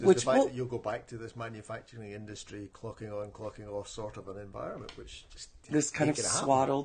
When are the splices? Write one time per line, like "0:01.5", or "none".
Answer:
0:05.6